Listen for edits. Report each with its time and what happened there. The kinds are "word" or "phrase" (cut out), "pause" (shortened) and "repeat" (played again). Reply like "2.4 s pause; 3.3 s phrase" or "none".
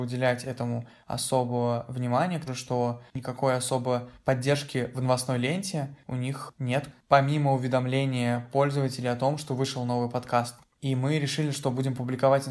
2.5 s word